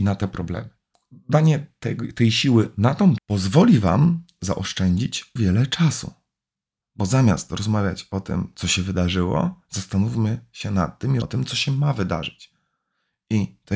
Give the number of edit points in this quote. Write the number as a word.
three